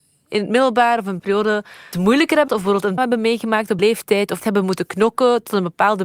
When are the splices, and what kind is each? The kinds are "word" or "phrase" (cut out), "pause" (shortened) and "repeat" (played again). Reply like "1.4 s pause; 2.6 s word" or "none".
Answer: 1.2 s word; 1.9 s word; 2.5 s word; 3.0 s word; 3.8 s word; 4.4 s word